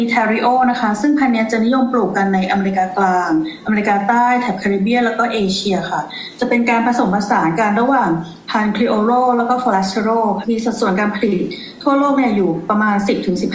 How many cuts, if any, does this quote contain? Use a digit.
1